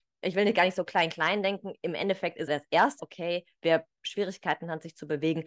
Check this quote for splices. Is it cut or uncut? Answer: cut